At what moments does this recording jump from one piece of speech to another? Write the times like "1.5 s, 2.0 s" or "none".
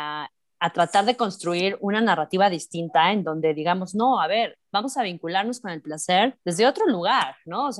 6.4 s